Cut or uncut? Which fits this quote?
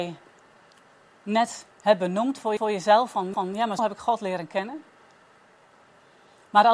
cut